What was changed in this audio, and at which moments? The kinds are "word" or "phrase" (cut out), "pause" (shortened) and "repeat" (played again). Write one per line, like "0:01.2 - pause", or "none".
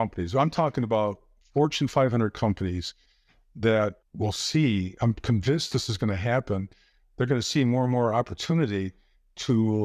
none